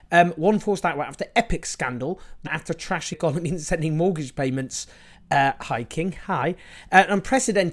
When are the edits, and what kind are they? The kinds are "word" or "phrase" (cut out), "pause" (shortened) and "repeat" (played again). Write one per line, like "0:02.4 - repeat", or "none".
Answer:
0:02.5 - word
0:03.1 - word